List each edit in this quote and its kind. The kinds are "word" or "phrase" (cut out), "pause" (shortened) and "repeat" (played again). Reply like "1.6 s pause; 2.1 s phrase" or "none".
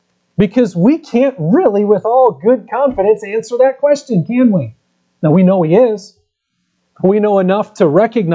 none